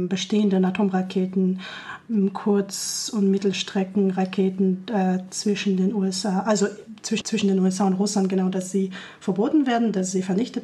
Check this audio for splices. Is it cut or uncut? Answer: cut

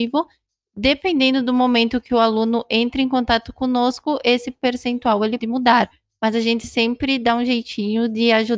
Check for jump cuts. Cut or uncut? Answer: cut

